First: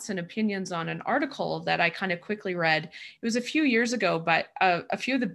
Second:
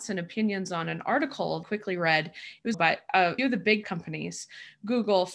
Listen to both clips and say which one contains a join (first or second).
second